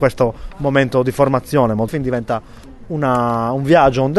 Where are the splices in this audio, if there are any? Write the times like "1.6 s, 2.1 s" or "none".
1.9 s